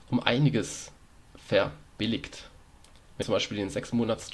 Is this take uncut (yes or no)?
no